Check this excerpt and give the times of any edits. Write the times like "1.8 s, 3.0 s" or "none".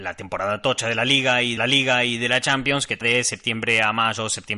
1.6 s, 3.0 s